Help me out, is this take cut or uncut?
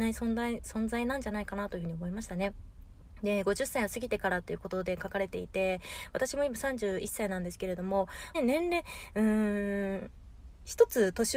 cut